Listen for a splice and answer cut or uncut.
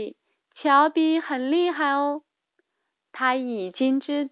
uncut